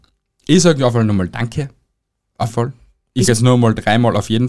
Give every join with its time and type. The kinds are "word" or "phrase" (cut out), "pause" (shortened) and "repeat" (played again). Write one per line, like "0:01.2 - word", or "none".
0:00.9 - word
0:02.5 - word
0:03.3 - word